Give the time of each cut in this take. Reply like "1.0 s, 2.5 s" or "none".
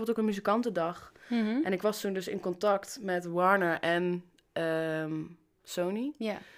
none